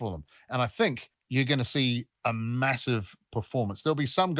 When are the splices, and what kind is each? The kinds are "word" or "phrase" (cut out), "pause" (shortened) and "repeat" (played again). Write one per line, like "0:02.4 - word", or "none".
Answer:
none